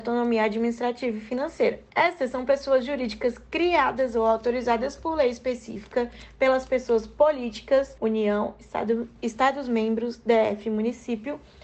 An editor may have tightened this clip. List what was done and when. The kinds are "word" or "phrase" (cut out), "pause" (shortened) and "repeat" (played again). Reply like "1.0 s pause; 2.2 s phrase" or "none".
1.9 s pause; 8.0 s pause